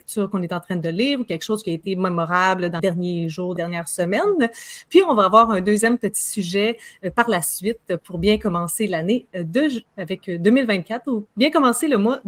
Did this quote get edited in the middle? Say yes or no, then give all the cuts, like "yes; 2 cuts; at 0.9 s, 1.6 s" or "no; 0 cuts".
yes; 3 cuts; at 2.8 s, 3.6 s, 9.9 s